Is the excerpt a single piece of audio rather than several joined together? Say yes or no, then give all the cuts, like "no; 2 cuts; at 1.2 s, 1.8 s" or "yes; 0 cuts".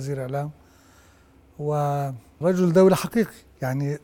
no; 1 cut; at 2.4 s